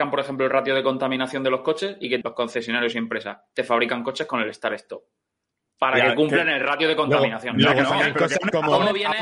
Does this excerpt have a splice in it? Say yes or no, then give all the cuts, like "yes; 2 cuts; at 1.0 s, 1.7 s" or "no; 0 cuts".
yes; 1 cut; at 2.2 s